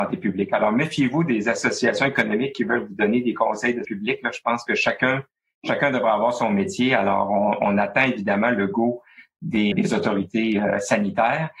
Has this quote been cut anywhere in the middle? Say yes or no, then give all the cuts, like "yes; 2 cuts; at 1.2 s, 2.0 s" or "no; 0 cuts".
yes; 2 cuts; at 3.8 s, 9.7 s